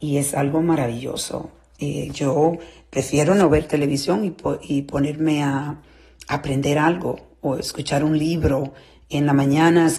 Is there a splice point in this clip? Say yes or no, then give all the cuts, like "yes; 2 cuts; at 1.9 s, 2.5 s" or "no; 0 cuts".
no; 0 cuts